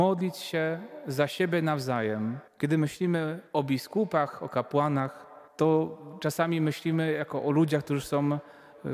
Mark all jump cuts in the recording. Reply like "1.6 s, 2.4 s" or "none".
2.5 s, 3.5 s, 5.5 s